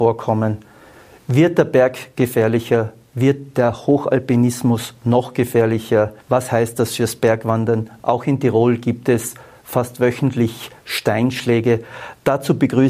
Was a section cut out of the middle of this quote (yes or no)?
yes